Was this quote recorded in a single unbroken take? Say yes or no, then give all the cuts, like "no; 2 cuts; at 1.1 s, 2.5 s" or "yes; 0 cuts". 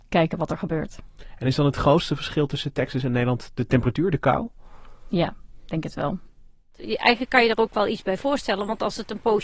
yes; 0 cuts